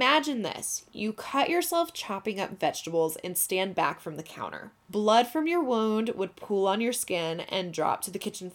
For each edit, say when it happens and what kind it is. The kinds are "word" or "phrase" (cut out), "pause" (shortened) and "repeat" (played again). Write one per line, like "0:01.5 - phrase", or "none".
0:04.8 - pause